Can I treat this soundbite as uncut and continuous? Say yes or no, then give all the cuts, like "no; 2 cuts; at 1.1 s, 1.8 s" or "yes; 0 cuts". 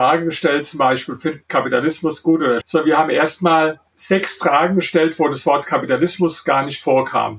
no; 3 cuts; at 1.4 s, 2.6 s, 3.9 s